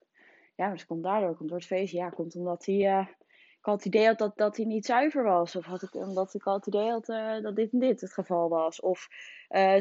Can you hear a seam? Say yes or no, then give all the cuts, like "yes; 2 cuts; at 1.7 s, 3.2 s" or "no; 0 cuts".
no; 0 cuts